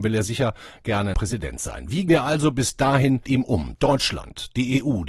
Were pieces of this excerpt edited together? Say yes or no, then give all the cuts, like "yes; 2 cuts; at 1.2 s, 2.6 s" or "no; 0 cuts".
yes; 3 cuts; at 1.1 s, 2.1 s, 3.2 s